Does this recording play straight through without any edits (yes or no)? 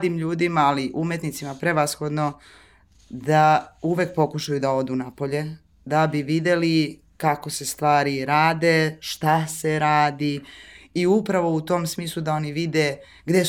yes